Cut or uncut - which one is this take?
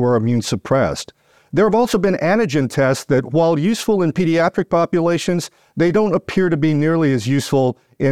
uncut